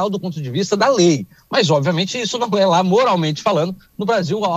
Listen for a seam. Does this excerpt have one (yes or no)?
no